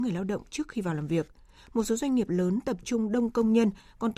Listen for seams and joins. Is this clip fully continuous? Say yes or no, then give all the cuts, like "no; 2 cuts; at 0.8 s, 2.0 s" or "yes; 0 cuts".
yes; 0 cuts